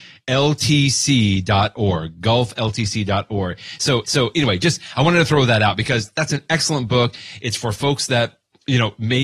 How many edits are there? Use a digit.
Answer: 1